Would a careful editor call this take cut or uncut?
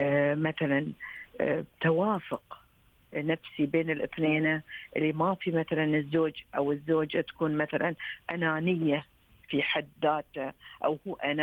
uncut